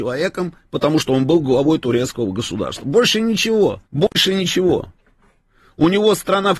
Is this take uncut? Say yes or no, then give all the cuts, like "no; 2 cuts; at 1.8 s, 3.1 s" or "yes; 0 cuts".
no; 1 cut; at 3.9 s